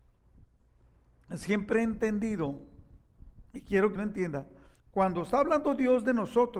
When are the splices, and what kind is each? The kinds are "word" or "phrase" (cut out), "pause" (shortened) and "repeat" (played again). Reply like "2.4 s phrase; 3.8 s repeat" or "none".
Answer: 4.0 s word; 4.7 s pause